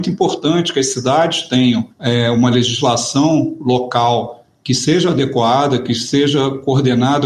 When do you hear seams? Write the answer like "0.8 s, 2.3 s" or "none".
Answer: 1.9 s

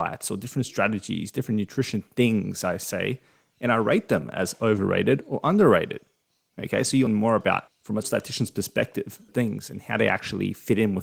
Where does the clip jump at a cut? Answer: 7.1 s, 7.7 s, 8.0 s, 9.3 s

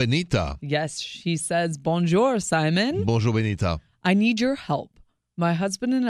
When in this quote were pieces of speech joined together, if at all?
none

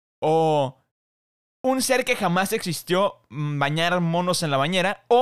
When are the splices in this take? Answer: none

